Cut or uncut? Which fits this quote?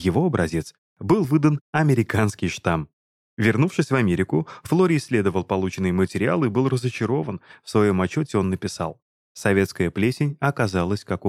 uncut